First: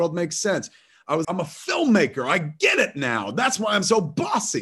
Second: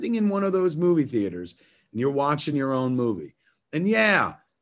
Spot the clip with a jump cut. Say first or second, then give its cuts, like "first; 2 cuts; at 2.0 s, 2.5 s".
first; 1 cut; at 1.2 s